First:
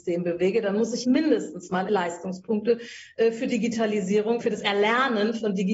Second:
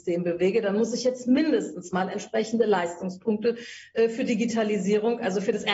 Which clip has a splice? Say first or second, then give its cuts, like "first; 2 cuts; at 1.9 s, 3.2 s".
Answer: first; 3 cuts; at 1.0 s, 1.9 s, 4.4 s